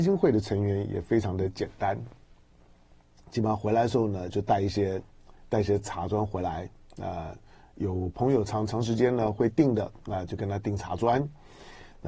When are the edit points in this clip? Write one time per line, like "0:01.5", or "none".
none